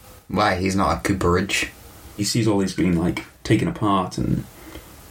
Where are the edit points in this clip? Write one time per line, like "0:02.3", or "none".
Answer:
0:02.2
0:02.8